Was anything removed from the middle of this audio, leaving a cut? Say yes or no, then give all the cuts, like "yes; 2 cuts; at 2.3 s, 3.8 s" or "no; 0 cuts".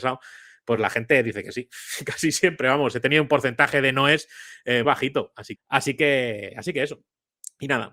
yes; 2 cuts; at 4.8 s, 5.6 s